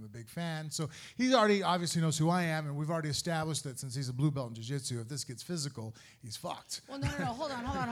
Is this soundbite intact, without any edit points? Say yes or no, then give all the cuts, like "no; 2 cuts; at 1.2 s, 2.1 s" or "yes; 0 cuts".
yes; 0 cuts